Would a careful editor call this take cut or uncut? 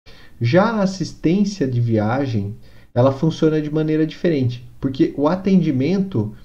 uncut